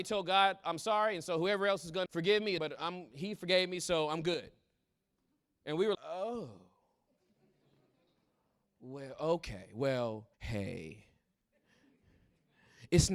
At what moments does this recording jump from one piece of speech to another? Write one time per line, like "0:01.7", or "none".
0:02.1
0:02.6
0:05.9
0:10.3

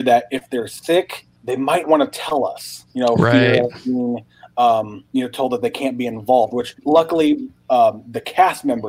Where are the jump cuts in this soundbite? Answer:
0:01.4
0:01.8
0:02.9
0:05.1
0:06.8

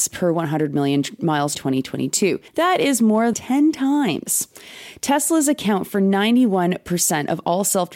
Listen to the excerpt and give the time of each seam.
0:01.5
0:02.5
0:03.3

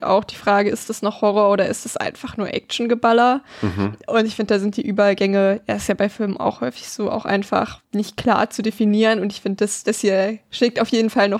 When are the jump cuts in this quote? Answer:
0:07.8

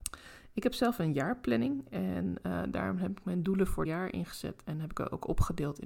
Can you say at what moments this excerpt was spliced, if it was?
0:03.9

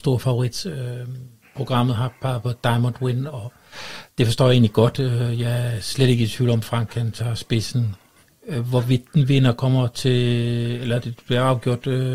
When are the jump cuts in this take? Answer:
0:01.4
0:03.3
0:04.1
0:08.2
0:11.0

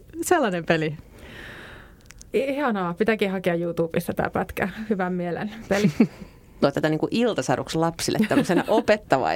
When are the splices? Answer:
0:02.3
0:06.6

